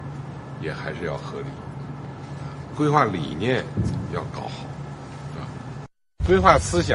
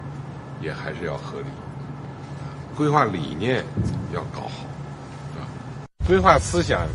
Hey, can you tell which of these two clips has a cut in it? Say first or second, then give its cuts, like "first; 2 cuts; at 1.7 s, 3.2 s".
second; 1 cut; at 5.9 s